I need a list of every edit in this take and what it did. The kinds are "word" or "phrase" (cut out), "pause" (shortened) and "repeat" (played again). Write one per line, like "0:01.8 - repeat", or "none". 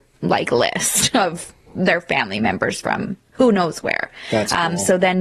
none